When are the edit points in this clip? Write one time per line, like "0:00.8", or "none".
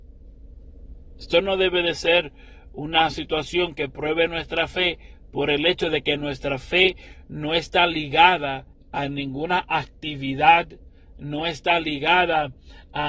0:08.7